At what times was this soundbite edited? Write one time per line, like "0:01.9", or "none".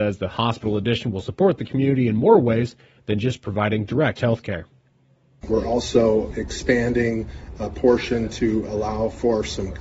none